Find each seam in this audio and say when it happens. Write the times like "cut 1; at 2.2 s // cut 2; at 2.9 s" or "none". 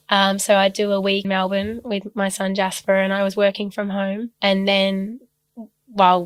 cut 1; at 1.2 s // cut 2; at 4.3 s